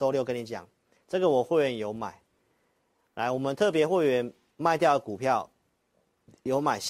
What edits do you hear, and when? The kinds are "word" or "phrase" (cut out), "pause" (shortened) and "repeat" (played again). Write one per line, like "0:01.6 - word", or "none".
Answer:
none